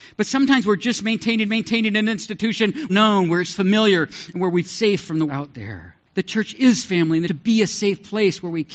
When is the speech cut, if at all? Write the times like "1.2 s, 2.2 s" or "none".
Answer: 1.5 s, 2.9 s, 4.6 s, 5.3 s, 6.1 s, 7.3 s